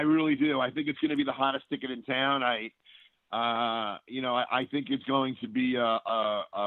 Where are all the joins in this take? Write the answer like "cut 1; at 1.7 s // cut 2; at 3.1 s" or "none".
none